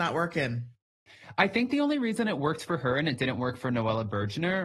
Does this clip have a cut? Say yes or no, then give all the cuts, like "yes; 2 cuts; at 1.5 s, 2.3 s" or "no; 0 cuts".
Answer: no; 0 cuts